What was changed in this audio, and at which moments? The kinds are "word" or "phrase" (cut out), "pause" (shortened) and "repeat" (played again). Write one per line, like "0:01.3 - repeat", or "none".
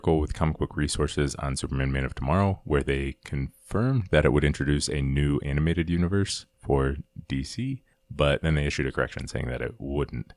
0:06.5 - pause
0:07.9 - pause